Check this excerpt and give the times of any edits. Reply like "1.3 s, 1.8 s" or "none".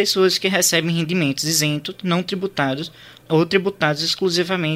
none